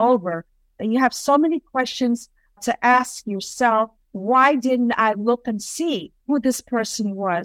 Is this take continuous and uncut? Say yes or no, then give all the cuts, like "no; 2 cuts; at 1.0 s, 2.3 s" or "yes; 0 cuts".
no; 3 cuts; at 2.6 s, 4.0 s, 6.2 s